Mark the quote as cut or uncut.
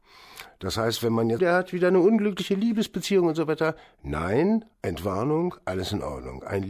cut